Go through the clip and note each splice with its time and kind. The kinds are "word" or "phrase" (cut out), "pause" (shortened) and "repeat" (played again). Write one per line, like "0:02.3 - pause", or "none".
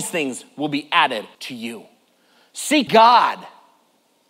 0:01.3 - pause
0:02.9 - word